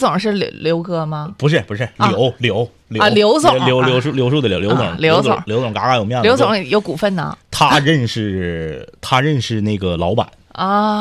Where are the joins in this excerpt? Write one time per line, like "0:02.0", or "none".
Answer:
0:07.4